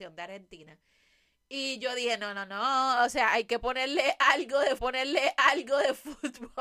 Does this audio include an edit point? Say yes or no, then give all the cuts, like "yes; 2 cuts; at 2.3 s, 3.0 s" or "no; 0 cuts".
yes; 1 cut; at 4.8 s